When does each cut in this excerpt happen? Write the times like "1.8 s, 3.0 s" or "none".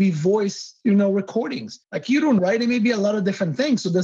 1.8 s, 2.4 s